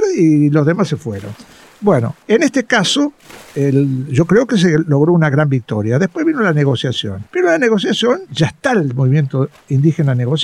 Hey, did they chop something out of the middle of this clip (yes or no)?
yes